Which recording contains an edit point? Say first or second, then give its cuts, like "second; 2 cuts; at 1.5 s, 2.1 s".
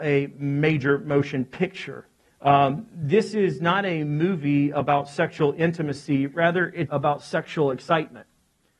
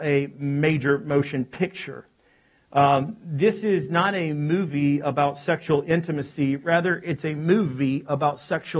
first; 2 cuts; at 2.3 s, 6.9 s